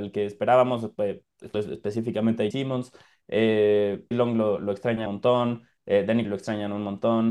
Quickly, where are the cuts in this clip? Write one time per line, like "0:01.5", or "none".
0:01.5
0:02.5
0:04.1
0:05.1
0:06.2